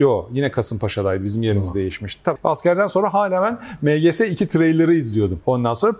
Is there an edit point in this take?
yes; 1 cut; at 2.4 s

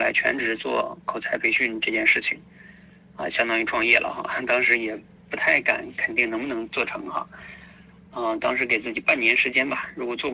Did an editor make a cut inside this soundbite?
no; 0 cuts

